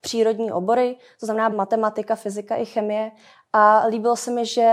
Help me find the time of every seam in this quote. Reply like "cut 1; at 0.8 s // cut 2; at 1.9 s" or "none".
cut 1; at 1.5 s